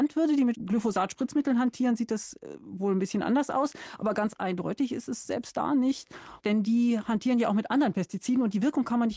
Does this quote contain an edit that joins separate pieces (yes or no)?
no